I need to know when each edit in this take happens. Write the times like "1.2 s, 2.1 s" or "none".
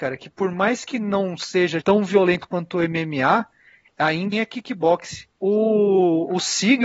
1.8 s, 4.3 s, 5.3 s

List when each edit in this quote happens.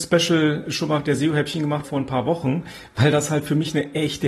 1.8 s

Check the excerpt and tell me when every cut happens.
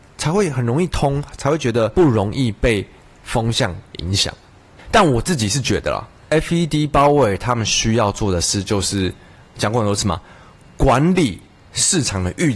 none

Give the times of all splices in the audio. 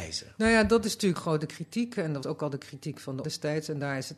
1.2 s, 2.2 s, 3.2 s

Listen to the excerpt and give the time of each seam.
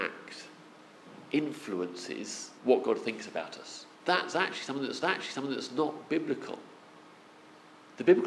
2.6 s, 3.9 s, 5.0 s

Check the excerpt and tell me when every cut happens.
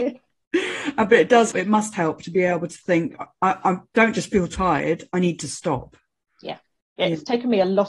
1.5 s

